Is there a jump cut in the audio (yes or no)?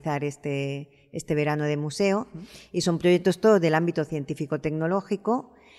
no